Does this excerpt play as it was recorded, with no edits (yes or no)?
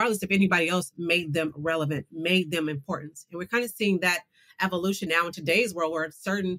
no